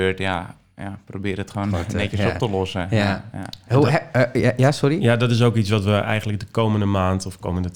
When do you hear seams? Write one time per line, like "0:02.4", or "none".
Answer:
none